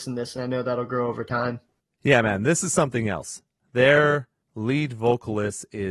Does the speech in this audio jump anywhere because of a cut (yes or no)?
no